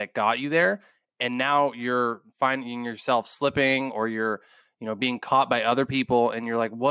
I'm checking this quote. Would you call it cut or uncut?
uncut